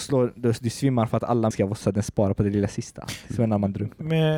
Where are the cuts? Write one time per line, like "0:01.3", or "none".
0:01.5
0:01.8